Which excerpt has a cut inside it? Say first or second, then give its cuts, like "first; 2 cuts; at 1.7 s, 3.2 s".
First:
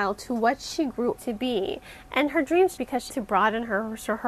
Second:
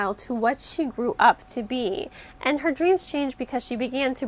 first; 3 cuts; at 1.2 s, 2.8 s, 3.1 s